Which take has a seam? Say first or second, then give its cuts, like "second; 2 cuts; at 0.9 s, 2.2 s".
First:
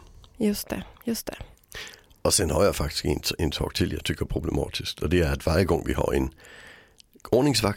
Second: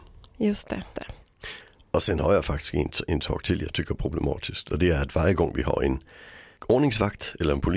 second; 2 cuts; at 0.9 s, 6.5 s